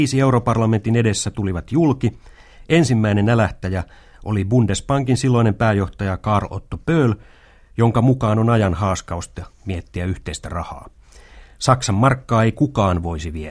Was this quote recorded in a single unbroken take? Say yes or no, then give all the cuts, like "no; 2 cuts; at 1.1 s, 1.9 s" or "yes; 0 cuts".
yes; 0 cuts